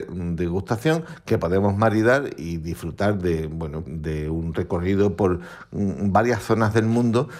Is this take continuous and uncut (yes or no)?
no